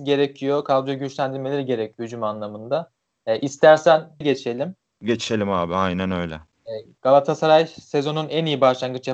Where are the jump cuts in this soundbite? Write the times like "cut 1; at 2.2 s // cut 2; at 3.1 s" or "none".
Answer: cut 1; at 4.2 s